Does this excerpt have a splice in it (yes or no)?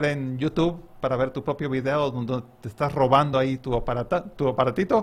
no